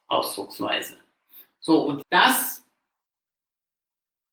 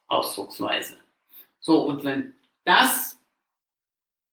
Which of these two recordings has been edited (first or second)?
first